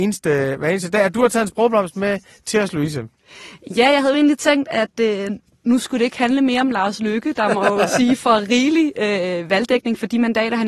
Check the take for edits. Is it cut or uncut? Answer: uncut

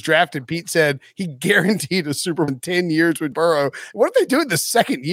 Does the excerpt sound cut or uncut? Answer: cut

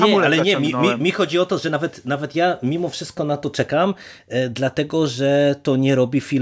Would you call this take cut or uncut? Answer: uncut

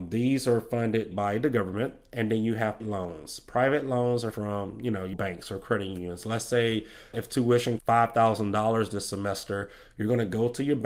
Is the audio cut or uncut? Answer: cut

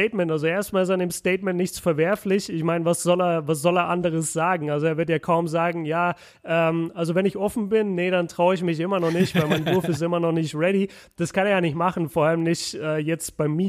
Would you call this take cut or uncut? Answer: uncut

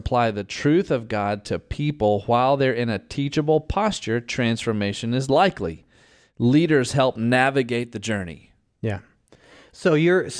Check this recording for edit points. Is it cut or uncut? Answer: uncut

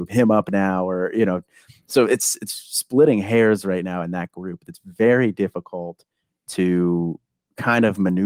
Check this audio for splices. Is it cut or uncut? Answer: uncut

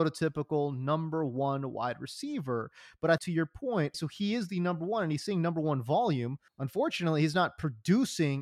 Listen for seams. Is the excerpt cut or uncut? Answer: cut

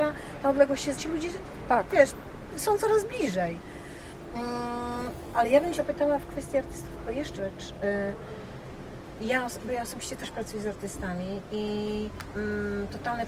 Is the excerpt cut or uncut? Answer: cut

